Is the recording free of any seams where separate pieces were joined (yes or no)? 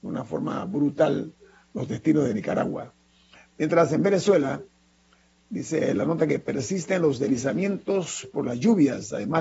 yes